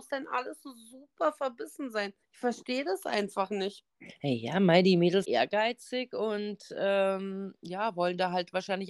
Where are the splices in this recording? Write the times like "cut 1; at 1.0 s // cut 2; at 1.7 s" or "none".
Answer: cut 1; at 2.2 s // cut 2; at 5.2 s